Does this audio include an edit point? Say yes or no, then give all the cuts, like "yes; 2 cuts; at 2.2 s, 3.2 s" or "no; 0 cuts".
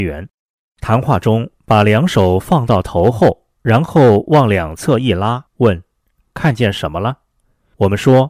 yes; 1 cut; at 5.5 s